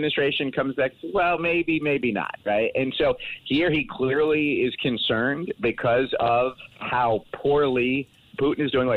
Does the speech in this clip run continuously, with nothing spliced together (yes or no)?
no